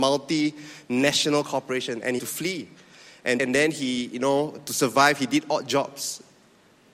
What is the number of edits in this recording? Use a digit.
2